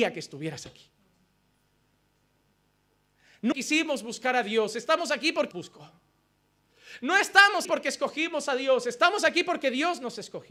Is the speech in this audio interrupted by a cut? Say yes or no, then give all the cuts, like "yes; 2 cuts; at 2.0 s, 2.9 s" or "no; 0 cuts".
yes; 3 cuts; at 3.5 s, 5.5 s, 7.6 s